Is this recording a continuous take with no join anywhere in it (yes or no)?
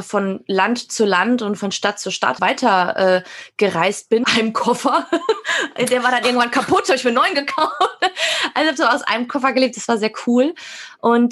no